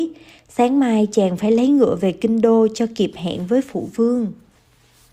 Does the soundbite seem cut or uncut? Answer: uncut